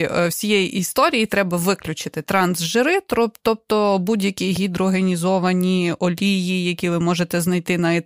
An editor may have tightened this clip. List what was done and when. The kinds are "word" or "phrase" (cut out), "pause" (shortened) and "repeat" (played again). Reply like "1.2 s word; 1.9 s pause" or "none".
none